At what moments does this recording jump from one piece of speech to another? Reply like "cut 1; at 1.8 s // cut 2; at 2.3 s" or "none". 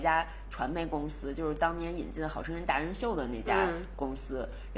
none